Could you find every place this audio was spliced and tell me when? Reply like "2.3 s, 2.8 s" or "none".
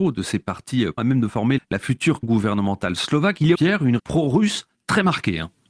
1.0 s, 1.6 s, 2.2 s, 3.5 s, 4.0 s